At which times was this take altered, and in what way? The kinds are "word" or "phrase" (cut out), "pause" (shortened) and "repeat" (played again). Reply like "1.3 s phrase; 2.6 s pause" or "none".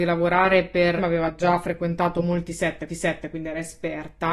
1.0 s phrase; 2.9 s repeat